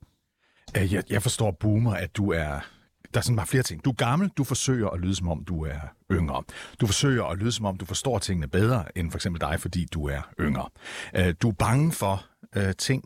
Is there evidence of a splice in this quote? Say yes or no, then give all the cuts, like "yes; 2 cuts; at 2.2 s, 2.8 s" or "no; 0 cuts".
no; 0 cuts